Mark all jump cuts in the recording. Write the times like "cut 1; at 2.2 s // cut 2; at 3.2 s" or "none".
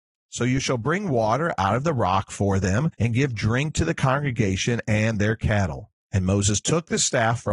cut 1; at 2.9 s // cut 2; at 6.0 s

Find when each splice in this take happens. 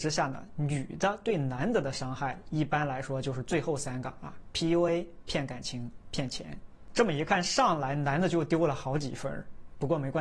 none

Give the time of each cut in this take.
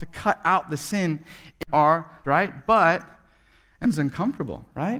cut 1; at 1.7 s // cut 2; at 2.2 s // cut 3; at 3.8 s

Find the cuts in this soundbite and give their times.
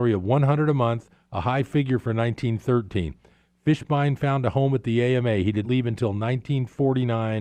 cut 1; at 5.6 s

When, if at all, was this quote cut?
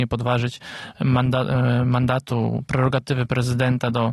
none

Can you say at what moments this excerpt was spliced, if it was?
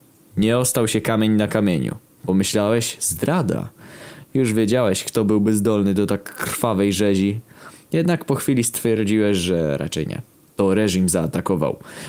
none

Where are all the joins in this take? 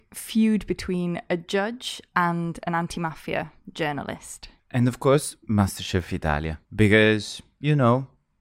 cut 1; at 4.6 s // cut 2; at 6.6 s

